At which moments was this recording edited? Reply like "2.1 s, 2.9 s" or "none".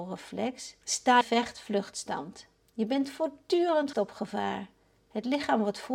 1.2 s, 3.9 s